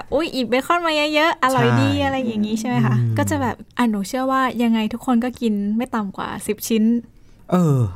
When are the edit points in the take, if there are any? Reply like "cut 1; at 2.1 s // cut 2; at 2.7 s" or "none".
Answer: cut 1; at 3.7 s